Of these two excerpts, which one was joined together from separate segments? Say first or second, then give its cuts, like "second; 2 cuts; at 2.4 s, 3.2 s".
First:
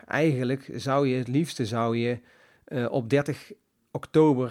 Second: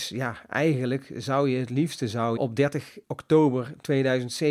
second; 2 cuts; at 2.4 s, 3.0 s